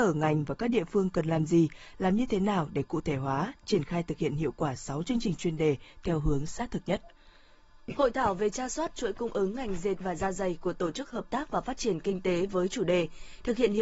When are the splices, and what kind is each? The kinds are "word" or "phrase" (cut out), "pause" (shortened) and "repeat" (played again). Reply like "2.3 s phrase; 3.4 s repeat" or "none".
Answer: 10.0 s word